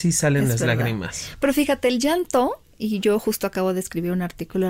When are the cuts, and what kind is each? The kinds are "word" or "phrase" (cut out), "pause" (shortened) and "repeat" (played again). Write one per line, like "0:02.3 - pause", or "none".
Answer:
none

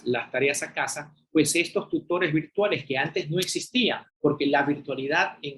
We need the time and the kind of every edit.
0:04.1 - pause

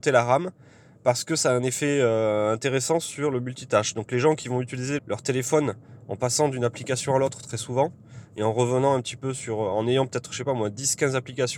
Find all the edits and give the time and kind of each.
0:05.0 - word

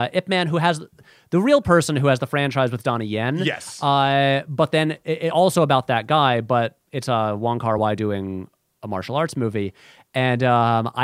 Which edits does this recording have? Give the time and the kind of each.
none

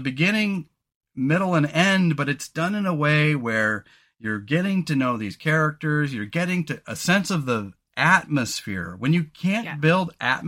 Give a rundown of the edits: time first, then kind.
none

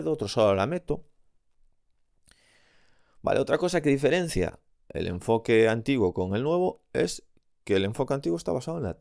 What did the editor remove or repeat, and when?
none

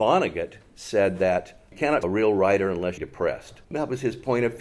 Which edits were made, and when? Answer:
0:02.0 - phrase
0:03.0 - phrase
0:03.6 - pause

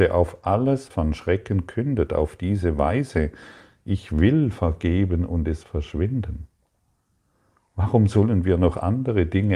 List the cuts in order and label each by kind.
0:00.9 - word
0:05.6 - word

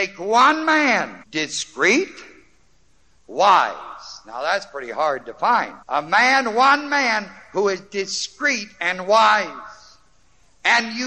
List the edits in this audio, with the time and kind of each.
0:01.2 - pause
0:05.8 - pause

